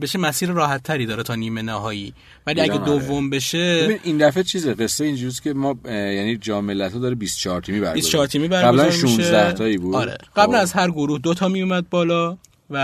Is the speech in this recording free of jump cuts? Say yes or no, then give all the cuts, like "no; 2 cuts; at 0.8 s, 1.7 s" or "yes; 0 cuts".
no; 1 cut; at 10.3 s